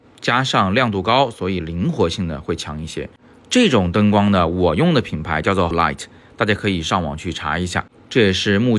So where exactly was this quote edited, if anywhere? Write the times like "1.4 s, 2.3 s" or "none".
5.7 s